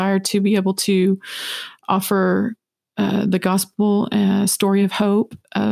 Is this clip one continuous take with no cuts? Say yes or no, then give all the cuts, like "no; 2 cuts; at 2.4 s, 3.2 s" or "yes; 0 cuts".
yes; 0 cuts